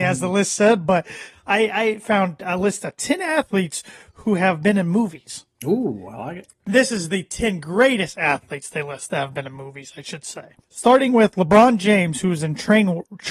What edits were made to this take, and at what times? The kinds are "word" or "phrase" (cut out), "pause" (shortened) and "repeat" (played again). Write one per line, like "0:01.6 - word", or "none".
0:05.5 - pause
0:10.6 - pause